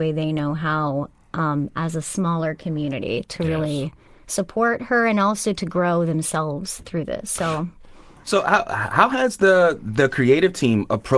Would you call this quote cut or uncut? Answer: uncut